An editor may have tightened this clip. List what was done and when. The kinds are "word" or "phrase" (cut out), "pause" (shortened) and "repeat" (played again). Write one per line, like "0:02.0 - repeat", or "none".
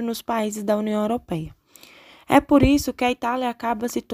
none